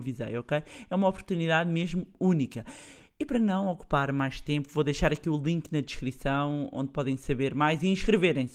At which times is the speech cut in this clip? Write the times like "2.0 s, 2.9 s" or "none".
none